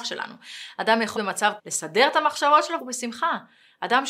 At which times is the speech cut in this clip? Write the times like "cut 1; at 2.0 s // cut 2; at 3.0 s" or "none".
cut 1; at 1.2 s // cut 2; at 1.6 s // cut 3; at 2.8 s